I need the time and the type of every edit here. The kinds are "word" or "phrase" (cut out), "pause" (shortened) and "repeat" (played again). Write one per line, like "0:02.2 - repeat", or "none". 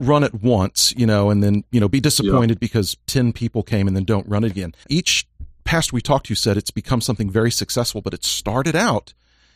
0:04.8 - pause